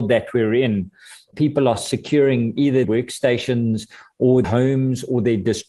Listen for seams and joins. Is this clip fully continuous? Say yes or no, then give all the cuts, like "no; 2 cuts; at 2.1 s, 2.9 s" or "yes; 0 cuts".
no; 2 cuts; at 2.8 s, 4.4 s